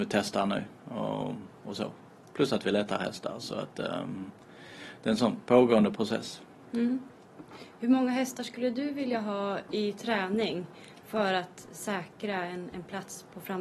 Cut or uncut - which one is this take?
uncut